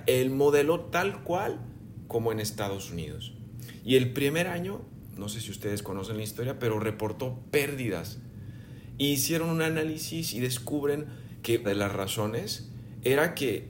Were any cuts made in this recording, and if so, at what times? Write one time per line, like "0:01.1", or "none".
0:11.6